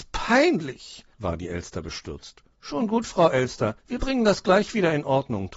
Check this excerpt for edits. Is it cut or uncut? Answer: cut